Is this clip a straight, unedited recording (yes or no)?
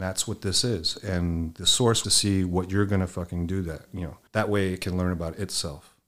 no